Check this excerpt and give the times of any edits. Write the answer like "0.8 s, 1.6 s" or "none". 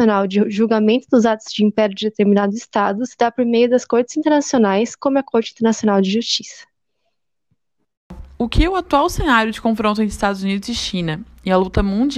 8.3 s